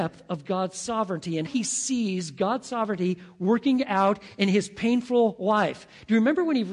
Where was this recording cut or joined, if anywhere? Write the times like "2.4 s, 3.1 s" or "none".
1.5 s

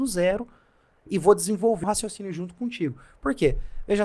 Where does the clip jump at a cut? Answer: 1.8 s

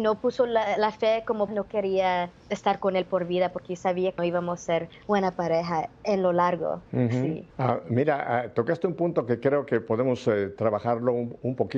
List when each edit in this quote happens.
1.5 s, 2.4 s, 4.2 s, 6.9 s, 7.5 s

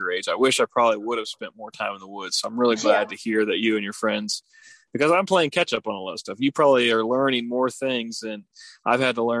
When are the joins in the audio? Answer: none

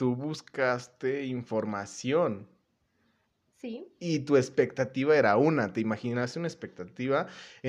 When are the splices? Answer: none

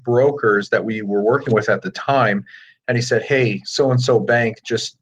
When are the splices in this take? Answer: none

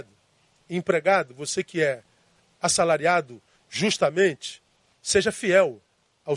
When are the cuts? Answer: none

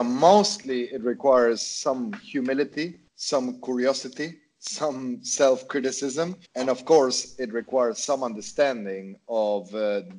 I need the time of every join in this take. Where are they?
3.1 s, 6.4 s

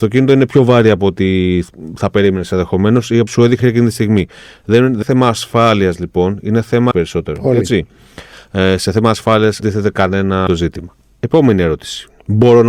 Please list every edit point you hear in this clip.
3.3 s, 3.6 s, 5.0 s, 6.9 s, 9.6 s, 10.5 s

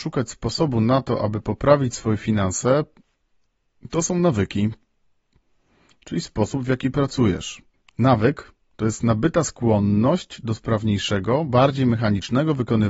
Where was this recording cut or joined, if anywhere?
7.7 s

